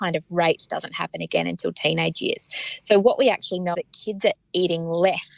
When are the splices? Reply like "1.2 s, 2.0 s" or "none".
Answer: 3.7 s

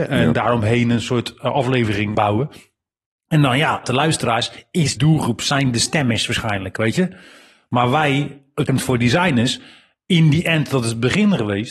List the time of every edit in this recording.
2.1 s, 3.8 s, 5.0 s, 8.7 s

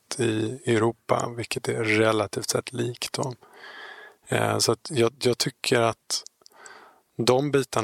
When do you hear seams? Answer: none

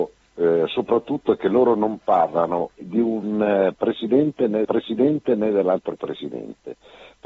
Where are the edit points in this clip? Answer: 2.8 s, 4.6 s

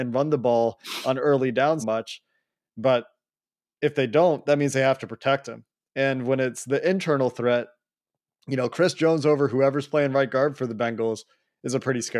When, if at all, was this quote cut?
1.8 s

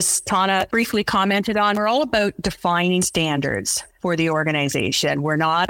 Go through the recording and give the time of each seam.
none

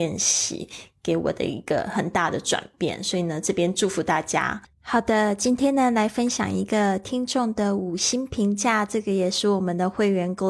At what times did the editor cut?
4.7 s

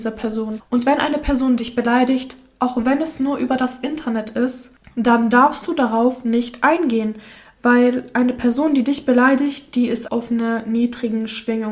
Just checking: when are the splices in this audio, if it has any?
10.0 s

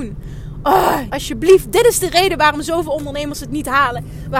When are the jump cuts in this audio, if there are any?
1.1 s

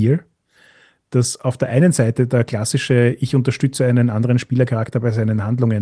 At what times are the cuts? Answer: none

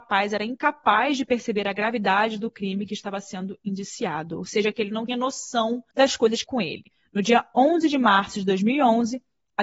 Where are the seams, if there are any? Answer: 5.1 s, 5.9 s, 6.4 s, 6.9 s

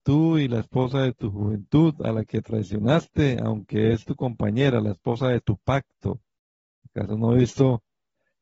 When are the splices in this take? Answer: none

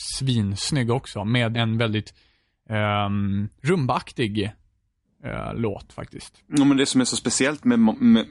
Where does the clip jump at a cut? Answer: 1.5 s, 3.6 s

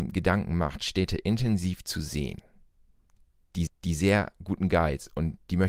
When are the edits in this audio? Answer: 3.7 s

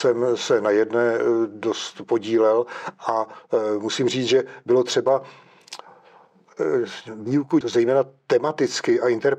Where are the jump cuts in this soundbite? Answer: 7.6 s

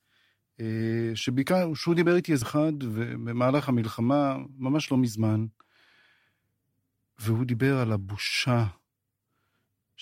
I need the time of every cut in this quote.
1.8 s, 2.4 s

